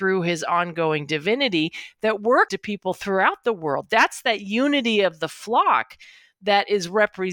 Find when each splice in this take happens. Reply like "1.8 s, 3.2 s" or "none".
2.5 s

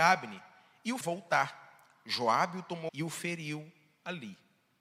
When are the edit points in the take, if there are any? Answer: 1.0 s, 2.9 s

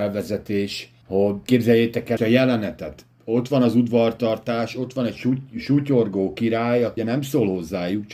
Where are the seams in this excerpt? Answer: 1.0 s, 2.2 s, 3.1 s, 7.0 s

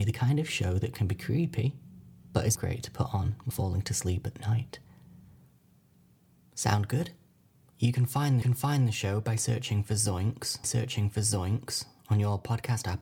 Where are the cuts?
2.5 s, 3.5 s, 8.4 s, 10.6 s

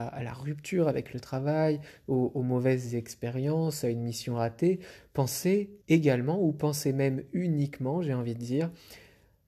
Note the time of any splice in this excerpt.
5.8 s

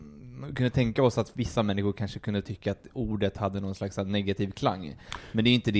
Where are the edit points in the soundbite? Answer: none

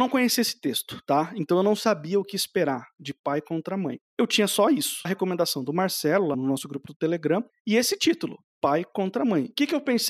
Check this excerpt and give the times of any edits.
5.0 s, 6.3 s

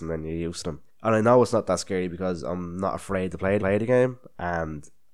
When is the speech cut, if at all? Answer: 3.6 s

